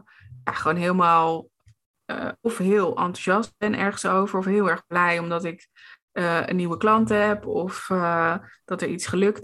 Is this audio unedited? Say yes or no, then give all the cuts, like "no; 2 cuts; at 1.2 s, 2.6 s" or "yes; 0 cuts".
yes; 0 cuts